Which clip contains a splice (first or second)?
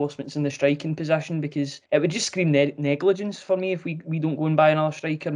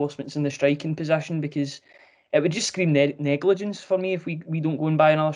first